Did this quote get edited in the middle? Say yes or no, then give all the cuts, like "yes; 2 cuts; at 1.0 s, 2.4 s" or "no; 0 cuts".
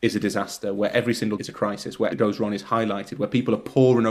yes; 2 cuts; at 1.4 s, 2.1 s